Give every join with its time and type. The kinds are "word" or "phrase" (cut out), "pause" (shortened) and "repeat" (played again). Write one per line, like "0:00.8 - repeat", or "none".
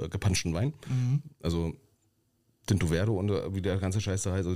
none